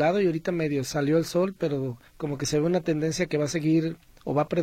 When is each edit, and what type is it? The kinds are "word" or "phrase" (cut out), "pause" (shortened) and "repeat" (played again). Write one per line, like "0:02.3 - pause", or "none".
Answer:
0:02.1 - pause